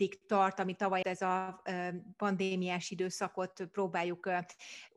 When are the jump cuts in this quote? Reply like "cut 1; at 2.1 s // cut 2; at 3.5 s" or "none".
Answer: cut 1; at 1.0 s